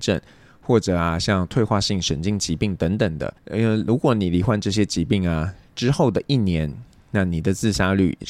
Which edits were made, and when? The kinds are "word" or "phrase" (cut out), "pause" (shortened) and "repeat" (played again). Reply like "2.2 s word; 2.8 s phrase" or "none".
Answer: 3.4 s pause